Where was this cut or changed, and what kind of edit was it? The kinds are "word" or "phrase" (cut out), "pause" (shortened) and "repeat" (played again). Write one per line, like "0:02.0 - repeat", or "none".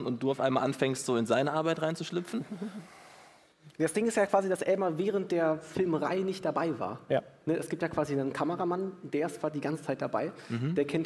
none